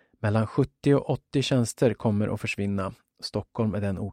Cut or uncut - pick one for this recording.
uncut